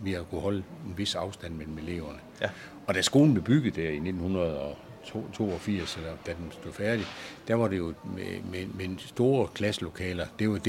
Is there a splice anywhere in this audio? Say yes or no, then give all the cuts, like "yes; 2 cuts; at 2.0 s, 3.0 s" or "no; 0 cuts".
no; 0 cuts